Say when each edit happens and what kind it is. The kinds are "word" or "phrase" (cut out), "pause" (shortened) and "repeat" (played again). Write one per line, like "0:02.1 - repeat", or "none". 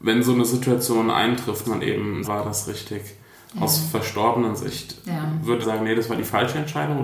0:01.6 - word
0:02.2 - phrase
0:05.6 - phrase